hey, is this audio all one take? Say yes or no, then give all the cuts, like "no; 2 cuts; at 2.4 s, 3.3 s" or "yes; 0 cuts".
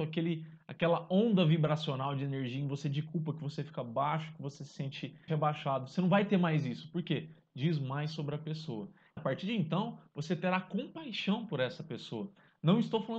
no; 2 cuts; at 5.3 s, 9.2 s